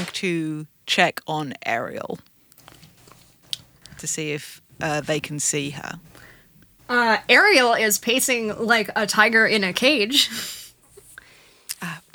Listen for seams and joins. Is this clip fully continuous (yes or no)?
yes